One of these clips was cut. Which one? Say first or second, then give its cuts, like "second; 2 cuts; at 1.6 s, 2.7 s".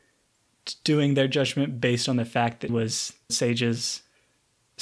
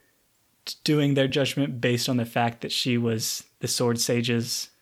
first; 2 cuts; at 2.7 s, 3.3 s